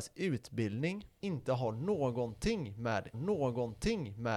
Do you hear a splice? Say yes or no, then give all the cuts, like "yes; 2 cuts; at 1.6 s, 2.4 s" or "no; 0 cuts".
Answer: yes; 2 cuts; at 1.2 s, 3.1 s